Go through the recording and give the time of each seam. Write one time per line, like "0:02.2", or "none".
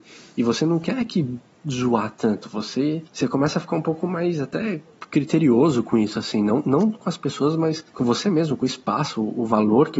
0:01.5
0:03.1
0:07.9